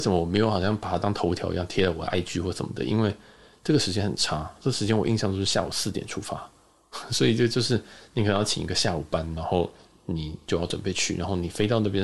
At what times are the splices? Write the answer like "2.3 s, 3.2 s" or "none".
none